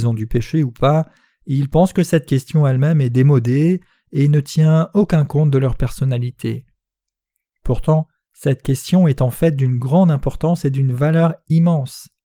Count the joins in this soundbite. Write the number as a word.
zero